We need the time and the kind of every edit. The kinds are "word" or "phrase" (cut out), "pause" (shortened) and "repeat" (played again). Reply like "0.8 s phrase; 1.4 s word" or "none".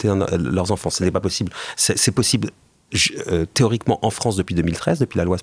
none